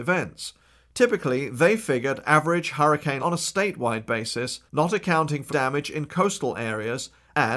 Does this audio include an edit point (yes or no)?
yes